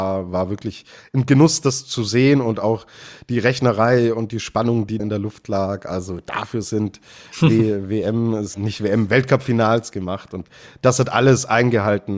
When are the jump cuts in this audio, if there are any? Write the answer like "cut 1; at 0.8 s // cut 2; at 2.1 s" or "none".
cut 1; at 5.0 s // cut 2; at 8.5 s